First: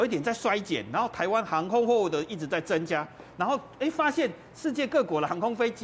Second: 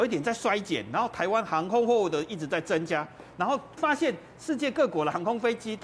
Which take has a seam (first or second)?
second